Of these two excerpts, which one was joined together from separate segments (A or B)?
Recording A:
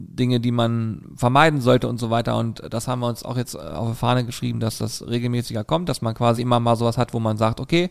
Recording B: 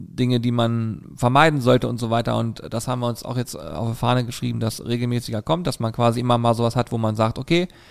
B